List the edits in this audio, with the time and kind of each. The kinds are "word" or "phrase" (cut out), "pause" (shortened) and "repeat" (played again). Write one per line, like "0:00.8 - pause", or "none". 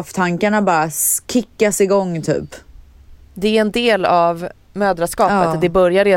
none